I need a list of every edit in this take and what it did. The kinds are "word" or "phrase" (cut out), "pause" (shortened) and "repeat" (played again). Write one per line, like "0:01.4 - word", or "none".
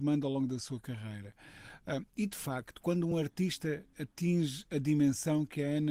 none